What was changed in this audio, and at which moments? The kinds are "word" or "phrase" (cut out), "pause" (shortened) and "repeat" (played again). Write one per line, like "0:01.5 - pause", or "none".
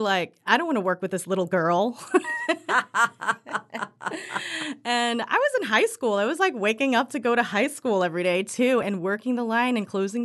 none